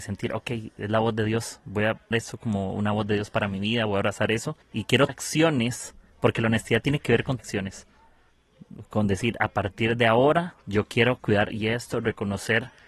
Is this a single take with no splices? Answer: no; 6 cuts; at 2.1 s, 4.6 s, 5.1 s, 7.4 s, 10.6 s, 11.5 s

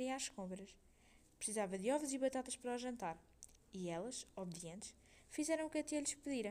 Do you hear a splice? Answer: no; 0 cuts

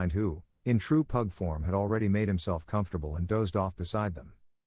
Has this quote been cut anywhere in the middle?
no; 0 cuts

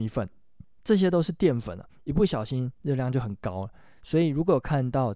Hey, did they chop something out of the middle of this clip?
no; 0 cuts

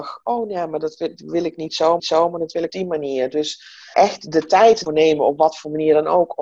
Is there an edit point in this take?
yes; 4 cuts; at 2.0 s, 2.7 s, 3.9 s, 4.9 s

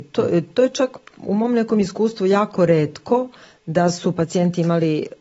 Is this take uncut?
yes; 0 cuts

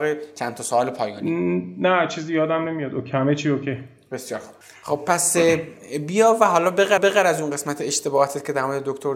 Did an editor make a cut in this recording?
yes; 2 cuts; at 4.6 s, 7.0 s

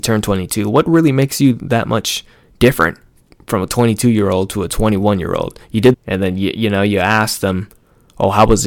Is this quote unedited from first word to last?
no; 1 cut; at 5.9 s

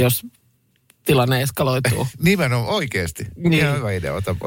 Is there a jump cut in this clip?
no; 0 cuts

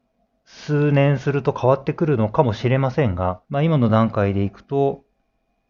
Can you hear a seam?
yes; 1 cut; at 3.4 s

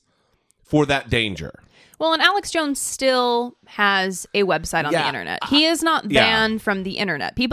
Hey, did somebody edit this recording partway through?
no; 0 cuts

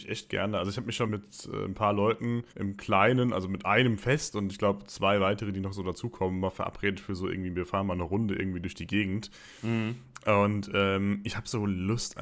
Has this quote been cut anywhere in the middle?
yes; 2 cuts; at 1.1 s, 2.5 s

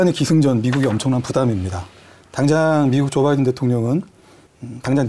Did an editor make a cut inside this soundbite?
no; 0 cuts

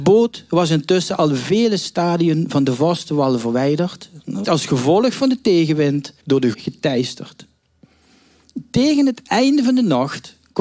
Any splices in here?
yes; 3 cuts; at 4.4 s, 6.2 s, 6.5 s

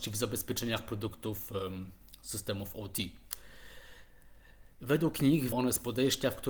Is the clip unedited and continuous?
no; 1 cut; at 5.5 s

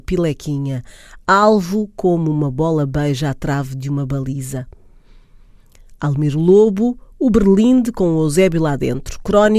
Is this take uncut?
yes; 0 cuts

